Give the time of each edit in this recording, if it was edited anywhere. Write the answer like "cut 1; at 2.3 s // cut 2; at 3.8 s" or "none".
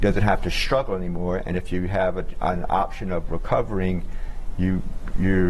none

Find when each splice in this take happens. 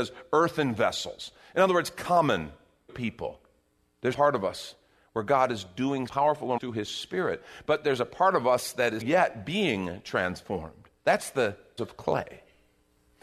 cut 1; at 2.9 s // cut 2; at 4.1 s // cut 3; at 6.1 s // cut 4; at 6.6 s // cut 5; at 9.0 s // cut 6; at 11.0 s // cut 7; at 11.8 s

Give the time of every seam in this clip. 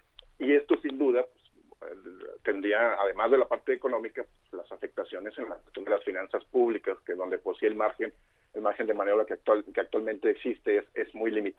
none

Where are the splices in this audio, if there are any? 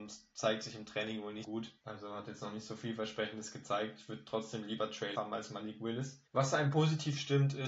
cut 1; at 1.4 s // cut 2; at 1.8 s // cut 3; at 5.1 s // cut 4; at 6.3 s

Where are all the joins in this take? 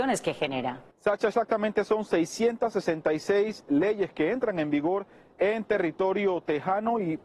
cut 1; at 0.9 s

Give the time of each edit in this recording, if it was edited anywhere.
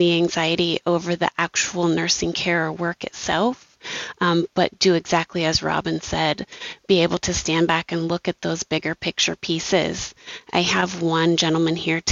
none

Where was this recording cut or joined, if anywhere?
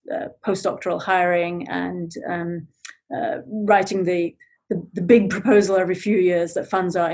none

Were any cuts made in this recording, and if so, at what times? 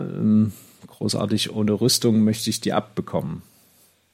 none

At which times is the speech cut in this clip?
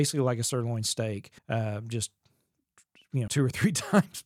cut 1; at 1.4 s // cut 2; at 3.3 s

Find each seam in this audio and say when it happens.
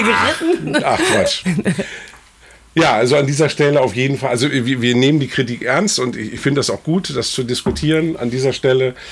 none

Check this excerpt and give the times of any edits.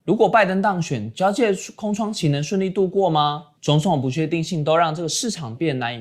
cut 1; at 3.6 s

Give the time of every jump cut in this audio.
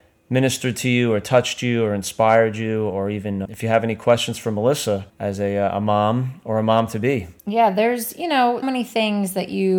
cut 1; at 3.4 s // cut 2; at 5.1 s // cut 3; at 7.4 s // cut 4; at 8.6 s

